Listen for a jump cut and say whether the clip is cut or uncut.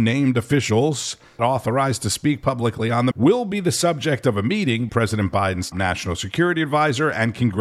cut